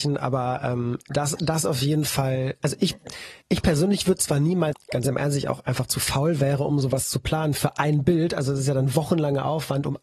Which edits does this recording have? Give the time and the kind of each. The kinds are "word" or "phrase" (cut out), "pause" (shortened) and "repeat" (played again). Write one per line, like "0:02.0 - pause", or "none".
0:03.4 - pause
0:04.7 - phrase